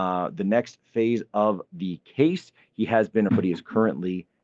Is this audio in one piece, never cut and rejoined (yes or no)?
no